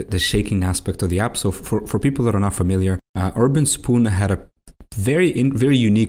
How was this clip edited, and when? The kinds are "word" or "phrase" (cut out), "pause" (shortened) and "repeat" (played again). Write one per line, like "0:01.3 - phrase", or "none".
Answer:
0:03.1 - pause